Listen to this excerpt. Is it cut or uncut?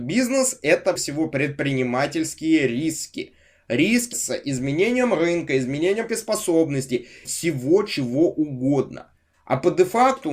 cut